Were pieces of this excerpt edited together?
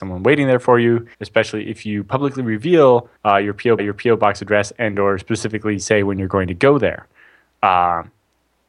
yes; 3 cuts; at 1.1 s, 3.2 s, 3.8 s

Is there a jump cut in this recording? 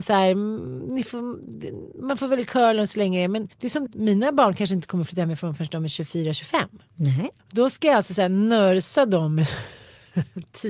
yes; 3 cuts; at 3.5 s, 3.9 s, 7.4 s

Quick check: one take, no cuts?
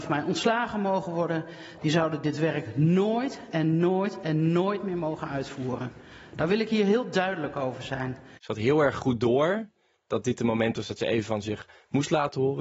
yes; 0 cuts

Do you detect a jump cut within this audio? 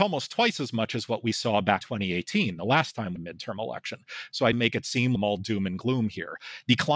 yes; 4 cuts; at 1.8 s, 3.2 s, 4.5 s, 5.2 s

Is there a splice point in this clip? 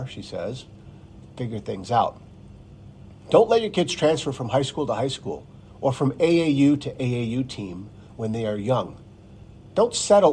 yes; 1 cut; at 6.8 s

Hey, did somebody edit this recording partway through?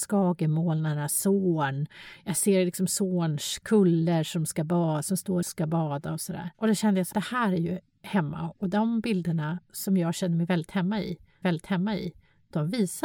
yes; 4 cuts; at 5.4 s, 6.5 s, 7.1 s, 11.4 s

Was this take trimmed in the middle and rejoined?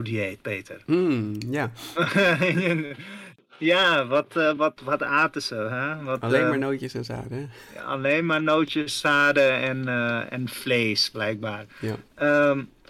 no; 0 cuts

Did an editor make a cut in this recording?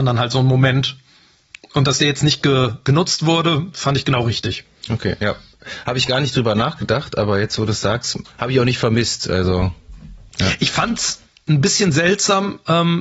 yes; 2 cuts; at 8.3 s, 10.3 s

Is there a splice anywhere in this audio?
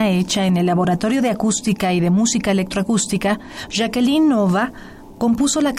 no; 0 cuts

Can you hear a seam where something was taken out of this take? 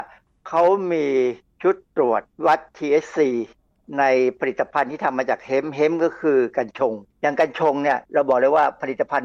yes; 2 cuts; at 7.1 s, 8.0 s

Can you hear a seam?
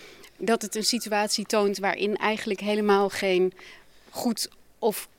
no; 0 cuts

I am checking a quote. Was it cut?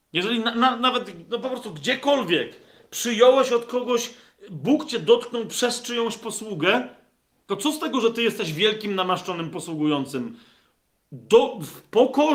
no; 0 cuts

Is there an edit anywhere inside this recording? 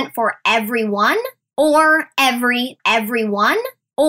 yes; 1 cut; at 2.8 s

